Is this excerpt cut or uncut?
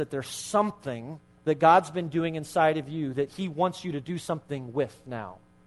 cut